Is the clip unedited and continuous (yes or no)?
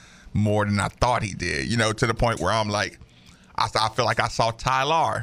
yes